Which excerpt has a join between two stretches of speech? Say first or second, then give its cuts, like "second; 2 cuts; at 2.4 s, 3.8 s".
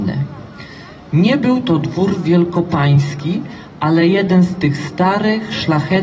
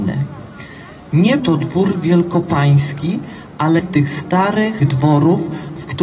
second; 3 cuts; at 1.4 s, 3.8 s, 4.8 s